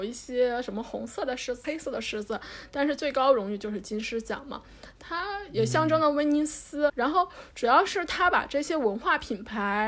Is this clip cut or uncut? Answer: cut